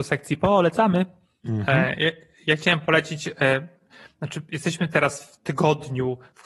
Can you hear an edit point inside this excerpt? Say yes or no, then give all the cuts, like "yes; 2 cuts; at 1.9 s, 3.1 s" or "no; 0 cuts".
no; 0 cuts